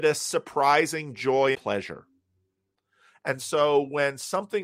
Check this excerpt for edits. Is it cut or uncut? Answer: cut